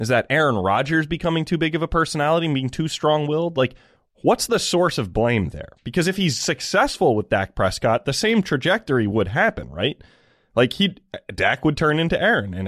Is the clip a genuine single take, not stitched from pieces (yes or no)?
yes